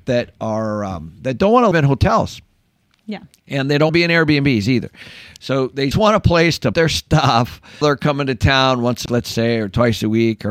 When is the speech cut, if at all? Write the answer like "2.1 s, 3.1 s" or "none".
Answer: 1.7 s, 3.9 s, 5.9 s, 6.7 s, 7.8 s, 9.1 s